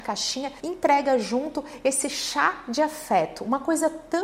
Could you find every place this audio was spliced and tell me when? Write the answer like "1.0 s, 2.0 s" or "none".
none